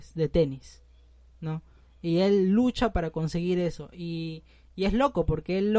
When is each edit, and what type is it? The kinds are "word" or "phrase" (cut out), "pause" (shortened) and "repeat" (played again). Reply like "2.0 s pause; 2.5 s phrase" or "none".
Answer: none